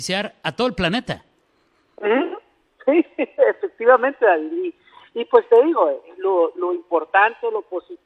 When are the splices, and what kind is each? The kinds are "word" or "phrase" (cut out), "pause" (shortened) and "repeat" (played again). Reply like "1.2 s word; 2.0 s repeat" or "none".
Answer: none